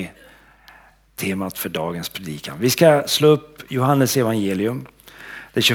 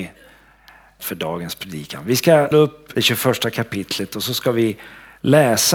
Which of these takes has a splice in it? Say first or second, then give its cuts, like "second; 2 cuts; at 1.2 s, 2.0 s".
second; 3 cuts; at 1.0 s, 2.5 s, 3.0 s